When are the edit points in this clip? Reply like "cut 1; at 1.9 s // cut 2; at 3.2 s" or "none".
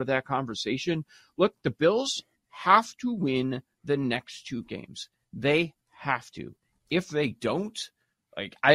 none